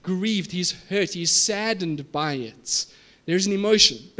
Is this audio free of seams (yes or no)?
yes